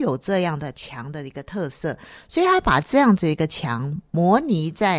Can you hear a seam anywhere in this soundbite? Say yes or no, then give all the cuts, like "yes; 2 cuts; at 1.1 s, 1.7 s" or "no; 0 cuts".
no; 0 cuts